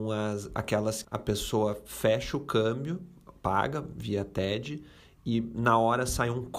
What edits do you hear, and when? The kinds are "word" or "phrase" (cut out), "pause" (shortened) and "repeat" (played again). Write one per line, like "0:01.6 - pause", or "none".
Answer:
0:01.0 - word